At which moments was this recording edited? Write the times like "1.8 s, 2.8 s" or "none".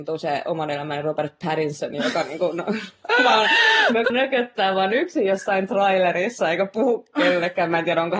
4.1 s